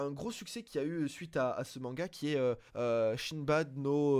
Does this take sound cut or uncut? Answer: cut